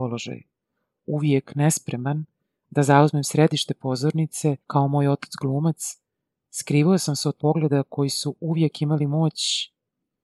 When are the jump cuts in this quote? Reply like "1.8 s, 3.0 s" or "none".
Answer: 4.6 s, 7.4 s